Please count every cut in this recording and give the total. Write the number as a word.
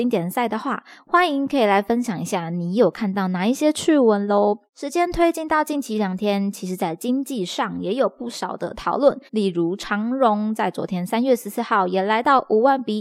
two